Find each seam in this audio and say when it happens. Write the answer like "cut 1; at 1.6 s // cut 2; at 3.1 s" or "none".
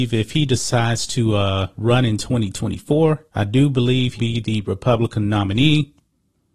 cut 1; at 3.3 s // cut 2; at 4.2 s